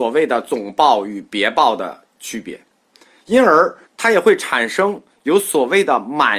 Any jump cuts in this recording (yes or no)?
yes